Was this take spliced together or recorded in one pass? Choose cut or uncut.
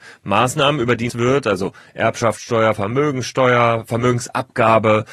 cut